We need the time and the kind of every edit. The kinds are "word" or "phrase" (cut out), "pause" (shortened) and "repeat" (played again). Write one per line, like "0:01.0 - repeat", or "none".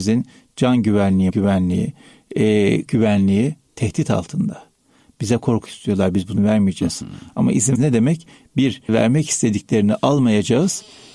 0:01.3 - word
0:02.9 - word
0:05.7 - word
0:06.4 - word
0:07.7 - word
0:08.9 - word